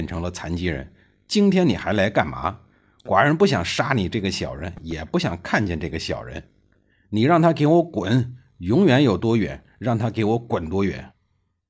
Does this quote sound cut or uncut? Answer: uncut